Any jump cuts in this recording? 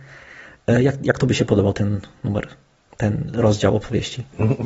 no; 0 cuts

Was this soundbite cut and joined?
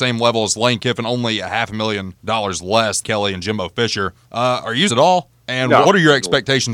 yes; 6 cuts; at 2.2 s, 3.0 s, 4.2 s, 4.9 s, 5.4 s, 5.8 s

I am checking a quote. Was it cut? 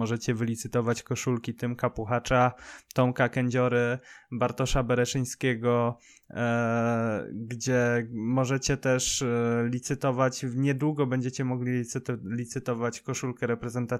no; 0 cuts

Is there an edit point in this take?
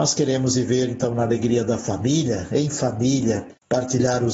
no; 0 cuts

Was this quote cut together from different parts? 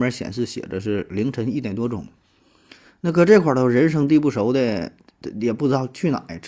no; 0 cuts

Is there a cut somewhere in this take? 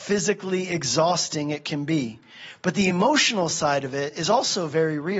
no; 0 cuts

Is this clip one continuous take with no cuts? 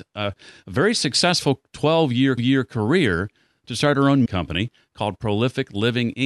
no; 2 cuts; at 2.4 s, 4.3 s

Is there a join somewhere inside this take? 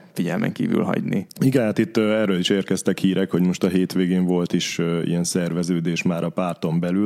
no; 0 cuts

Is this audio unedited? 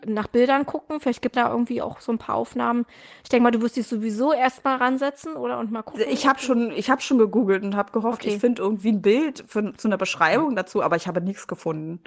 no; 1 cut; at 1.3 s

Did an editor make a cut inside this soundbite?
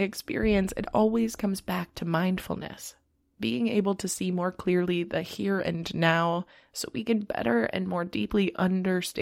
no; 0 cuts

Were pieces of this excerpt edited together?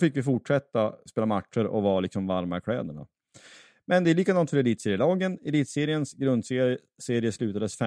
no; 0 cuts

